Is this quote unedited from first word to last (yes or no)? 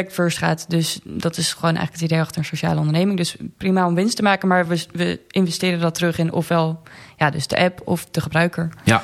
yes